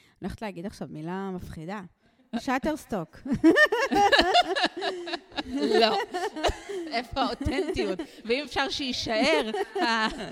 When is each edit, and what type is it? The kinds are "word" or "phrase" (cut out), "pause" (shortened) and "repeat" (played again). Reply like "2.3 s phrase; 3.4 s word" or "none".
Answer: none